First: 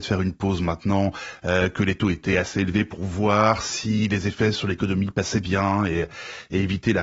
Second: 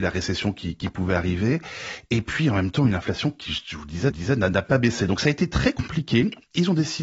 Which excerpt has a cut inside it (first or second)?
second